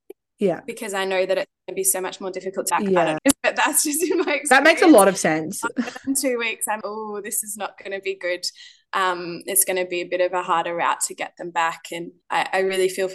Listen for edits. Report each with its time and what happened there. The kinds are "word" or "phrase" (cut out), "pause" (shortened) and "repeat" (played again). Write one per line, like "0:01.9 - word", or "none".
0:02.7 - phrase
0:03.2 - phrase
0:06.8 - word
0:12.2 - pause